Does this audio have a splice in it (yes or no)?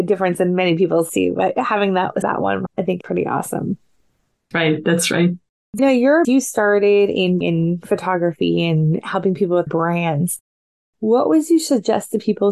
yes